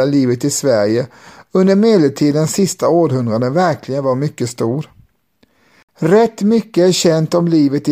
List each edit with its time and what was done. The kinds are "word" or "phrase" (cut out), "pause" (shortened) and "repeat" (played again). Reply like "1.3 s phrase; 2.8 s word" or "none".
none